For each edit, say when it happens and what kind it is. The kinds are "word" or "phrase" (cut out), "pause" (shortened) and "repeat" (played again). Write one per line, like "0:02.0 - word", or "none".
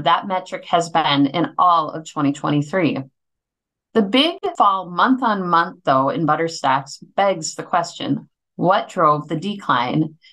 none